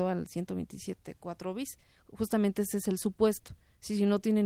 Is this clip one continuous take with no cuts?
yes; 0 cuts

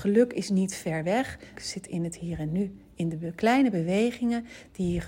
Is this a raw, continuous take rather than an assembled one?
no; 1 cut; at 1.6 s

